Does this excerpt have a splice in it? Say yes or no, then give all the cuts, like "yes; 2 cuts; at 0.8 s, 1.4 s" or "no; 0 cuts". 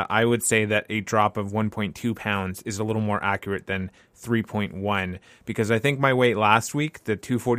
no; 0 cuts